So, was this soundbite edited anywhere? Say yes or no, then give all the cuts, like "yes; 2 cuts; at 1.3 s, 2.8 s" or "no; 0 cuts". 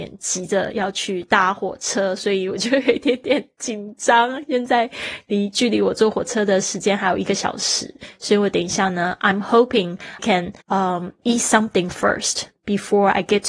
yes; 2 cuts; at 10.2 s, 10.6 s